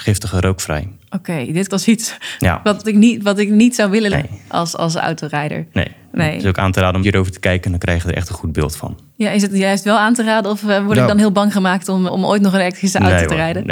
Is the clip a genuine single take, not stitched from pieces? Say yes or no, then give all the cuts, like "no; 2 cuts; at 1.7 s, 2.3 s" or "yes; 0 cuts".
no; 6 cuts; at 1.0 s, 1.7 s, 2.8 s, 4.1 s, 7.0 s, 12.1 s